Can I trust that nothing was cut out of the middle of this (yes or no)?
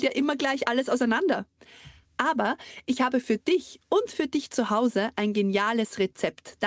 yes